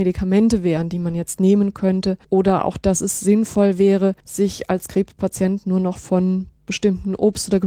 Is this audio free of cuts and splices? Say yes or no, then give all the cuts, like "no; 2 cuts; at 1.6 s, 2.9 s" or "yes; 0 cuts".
no; 3 cuts; at 2.2 s, 4.2 s, 6.6 s